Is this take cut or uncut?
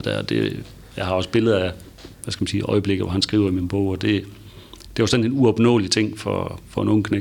cut